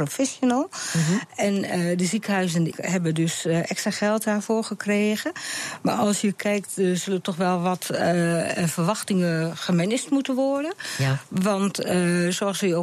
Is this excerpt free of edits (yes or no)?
no